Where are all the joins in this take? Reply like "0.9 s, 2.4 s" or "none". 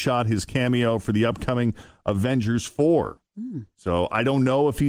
3.3 s